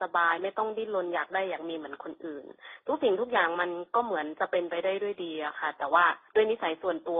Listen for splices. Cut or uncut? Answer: cut